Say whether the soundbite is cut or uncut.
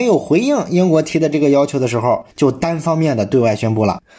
cut